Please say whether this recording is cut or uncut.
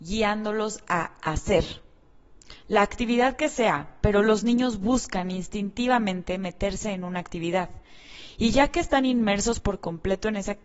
uncut